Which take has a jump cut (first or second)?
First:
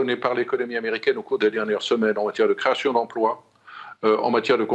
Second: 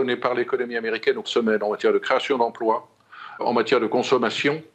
second